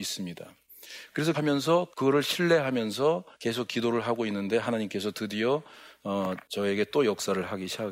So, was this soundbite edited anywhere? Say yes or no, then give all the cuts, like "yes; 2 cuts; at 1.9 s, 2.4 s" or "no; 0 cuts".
yes; 3 cuts; at 1.3 s, 1.9 s, 3.3 s